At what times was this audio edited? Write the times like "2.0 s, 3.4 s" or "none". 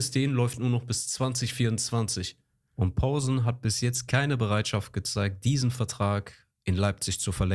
none